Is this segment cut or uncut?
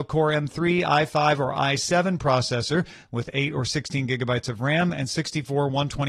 uncut